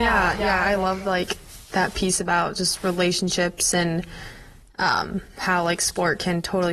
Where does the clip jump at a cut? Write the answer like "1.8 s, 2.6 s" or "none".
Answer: none